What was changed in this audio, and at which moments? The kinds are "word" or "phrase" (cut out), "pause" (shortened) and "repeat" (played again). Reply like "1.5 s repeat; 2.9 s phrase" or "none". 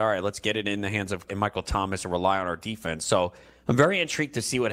1.3 s word